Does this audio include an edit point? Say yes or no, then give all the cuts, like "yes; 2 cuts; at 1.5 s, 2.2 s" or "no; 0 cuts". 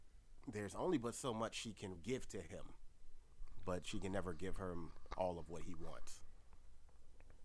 yes; 1 cut; at 1.9 s